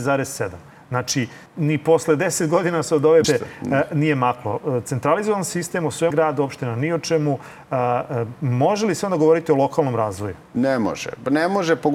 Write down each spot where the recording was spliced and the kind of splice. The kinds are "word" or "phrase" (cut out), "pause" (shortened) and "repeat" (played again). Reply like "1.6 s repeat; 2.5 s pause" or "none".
1.5 s pause; 3.2 s word; 6.1 s word